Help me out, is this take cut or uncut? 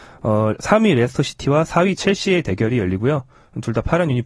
uncut